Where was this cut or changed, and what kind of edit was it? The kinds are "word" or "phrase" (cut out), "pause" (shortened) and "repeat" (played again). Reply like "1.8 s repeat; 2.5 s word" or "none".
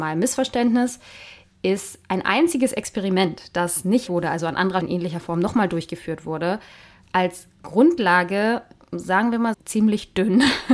4.1 s word; 4.8 s word; 9.5 s word